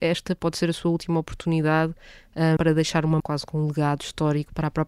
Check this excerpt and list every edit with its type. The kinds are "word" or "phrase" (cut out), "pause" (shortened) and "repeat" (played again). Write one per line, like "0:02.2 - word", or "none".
0:02.6 - word
0:03.2 - word